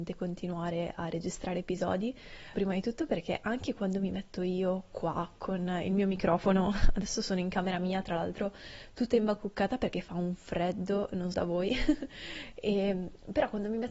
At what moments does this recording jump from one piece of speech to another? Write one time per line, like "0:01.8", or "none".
0:02.5
0:11.3